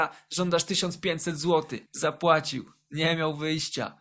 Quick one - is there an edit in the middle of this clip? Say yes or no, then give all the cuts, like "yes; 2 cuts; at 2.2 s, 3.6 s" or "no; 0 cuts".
no; 0 cuts